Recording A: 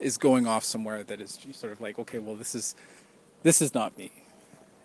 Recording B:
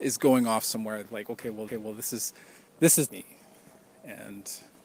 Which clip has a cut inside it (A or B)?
B